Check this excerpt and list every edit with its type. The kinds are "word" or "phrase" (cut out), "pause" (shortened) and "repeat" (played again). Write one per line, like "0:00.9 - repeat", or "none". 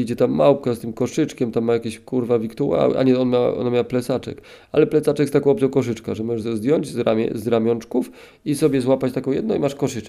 none